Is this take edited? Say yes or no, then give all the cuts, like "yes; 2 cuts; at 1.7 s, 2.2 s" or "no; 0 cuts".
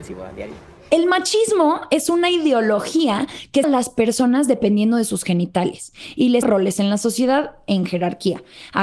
yes; 2 cuts; at 3.6 s, 6.4 s